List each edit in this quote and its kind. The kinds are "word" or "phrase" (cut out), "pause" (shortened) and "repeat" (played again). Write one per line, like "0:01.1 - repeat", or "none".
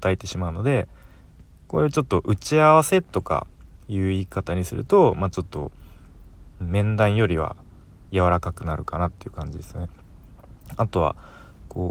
none